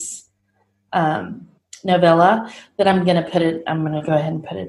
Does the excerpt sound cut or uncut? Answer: uncut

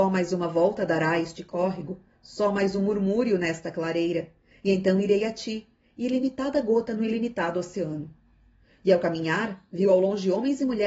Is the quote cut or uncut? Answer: uncut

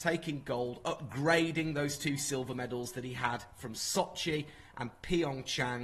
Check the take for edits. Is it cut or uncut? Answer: uncut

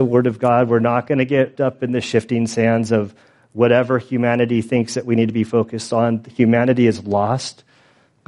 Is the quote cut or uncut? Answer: cut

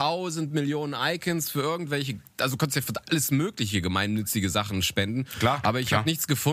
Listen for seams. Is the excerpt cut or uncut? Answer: uncut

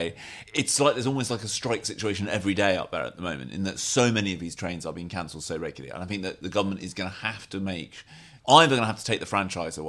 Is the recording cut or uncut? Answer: uncut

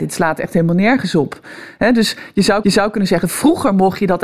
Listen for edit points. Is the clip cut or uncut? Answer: cut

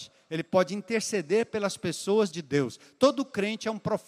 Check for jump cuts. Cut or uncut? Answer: cut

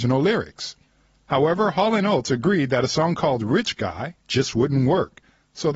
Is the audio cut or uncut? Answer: uncut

